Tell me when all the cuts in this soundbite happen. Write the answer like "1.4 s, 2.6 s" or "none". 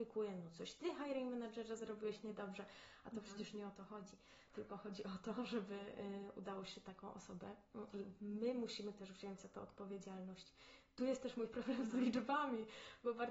7.9 s